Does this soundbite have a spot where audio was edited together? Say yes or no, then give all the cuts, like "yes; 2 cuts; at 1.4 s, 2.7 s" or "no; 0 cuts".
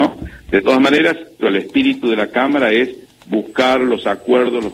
yes; 1 cut; at 1.4 s